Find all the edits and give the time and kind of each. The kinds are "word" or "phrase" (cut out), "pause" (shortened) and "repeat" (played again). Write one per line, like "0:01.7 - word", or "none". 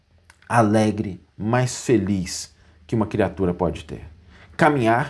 none